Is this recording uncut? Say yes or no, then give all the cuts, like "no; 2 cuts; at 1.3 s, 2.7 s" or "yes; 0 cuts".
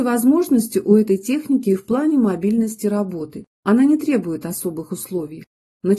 no; 1 cut; at 3.5 s